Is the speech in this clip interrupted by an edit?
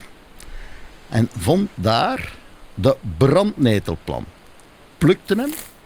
no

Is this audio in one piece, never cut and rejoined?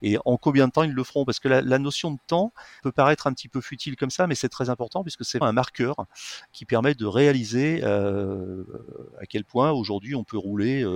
no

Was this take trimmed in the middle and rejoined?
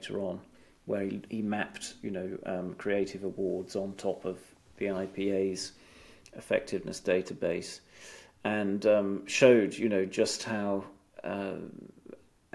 no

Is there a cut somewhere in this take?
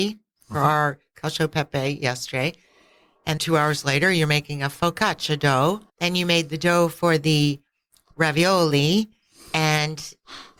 yes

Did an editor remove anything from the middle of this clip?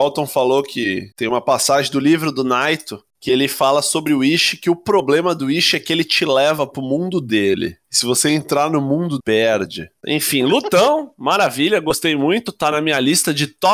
yes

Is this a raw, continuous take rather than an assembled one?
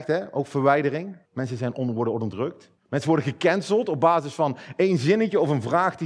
no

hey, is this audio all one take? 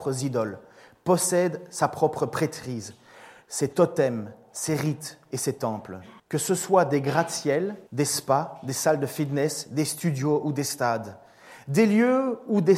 no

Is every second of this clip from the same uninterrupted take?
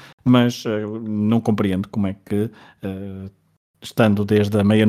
yes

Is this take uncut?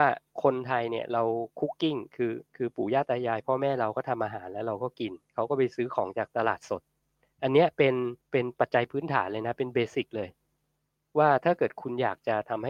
no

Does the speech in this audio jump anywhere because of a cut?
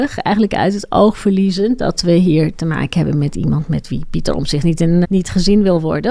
yes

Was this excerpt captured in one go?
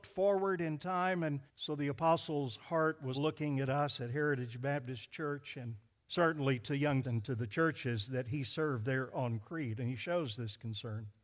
no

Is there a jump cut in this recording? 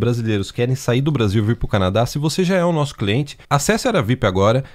yes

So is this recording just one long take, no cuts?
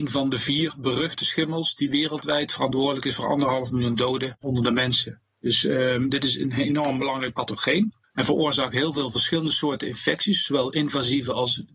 no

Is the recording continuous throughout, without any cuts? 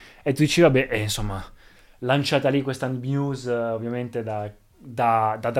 yes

